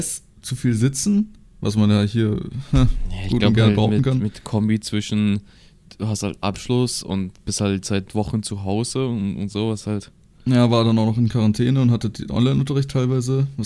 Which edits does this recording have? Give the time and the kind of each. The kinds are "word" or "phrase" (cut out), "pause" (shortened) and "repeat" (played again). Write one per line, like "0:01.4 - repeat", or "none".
none